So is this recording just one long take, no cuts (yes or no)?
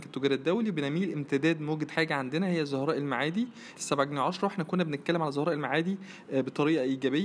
no